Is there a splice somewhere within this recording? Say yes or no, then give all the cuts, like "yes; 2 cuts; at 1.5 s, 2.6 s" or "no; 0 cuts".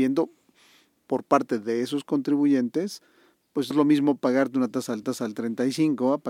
yes; 2 cuts; at 3.7 s, 5.0 s